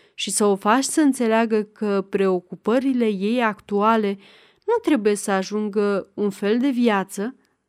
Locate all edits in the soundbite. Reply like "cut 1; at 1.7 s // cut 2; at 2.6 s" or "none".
none